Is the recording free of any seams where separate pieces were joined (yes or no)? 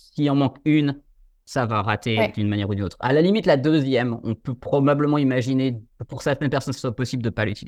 yes